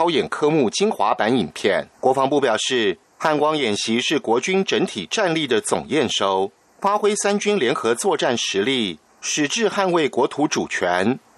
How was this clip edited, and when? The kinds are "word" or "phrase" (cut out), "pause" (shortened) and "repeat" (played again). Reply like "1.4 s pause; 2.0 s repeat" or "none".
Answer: 1.9 s pause